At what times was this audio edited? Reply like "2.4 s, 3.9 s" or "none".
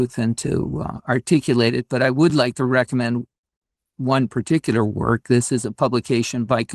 none